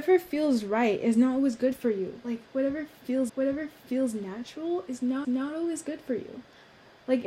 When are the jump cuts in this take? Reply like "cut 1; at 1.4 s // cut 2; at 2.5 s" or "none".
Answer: cut 1; at 3.3 s // cut 2; at 5.2 s